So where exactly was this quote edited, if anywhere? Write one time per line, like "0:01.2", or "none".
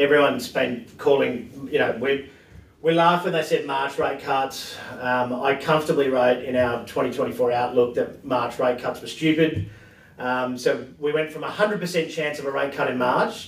none